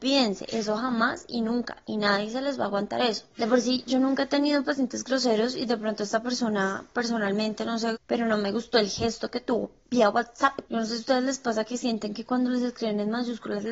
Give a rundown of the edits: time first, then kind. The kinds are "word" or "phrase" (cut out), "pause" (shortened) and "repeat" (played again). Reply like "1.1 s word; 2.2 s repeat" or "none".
3.3 s pause; 7.9 s word; 10.7 s pause